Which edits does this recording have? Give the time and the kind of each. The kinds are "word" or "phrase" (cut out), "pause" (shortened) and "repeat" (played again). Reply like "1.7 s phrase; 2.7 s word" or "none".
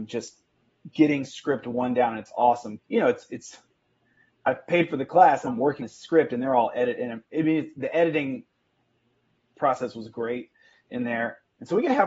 2.8 s word; 5.5 s word; 5.8 s word